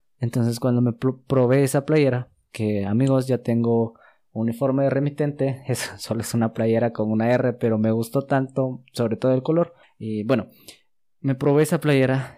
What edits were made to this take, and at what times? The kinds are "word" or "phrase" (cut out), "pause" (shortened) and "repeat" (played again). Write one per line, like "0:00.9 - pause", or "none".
0:09.8 - pause